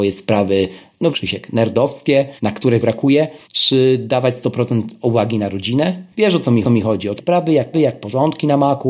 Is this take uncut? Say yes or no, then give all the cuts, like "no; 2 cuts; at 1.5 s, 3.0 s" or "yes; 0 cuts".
no; 7 cuts; at 1.1 s, 2.4 s, 2.8 s, 3.4 s, 6.6 s, 7.2 s, 7.7 s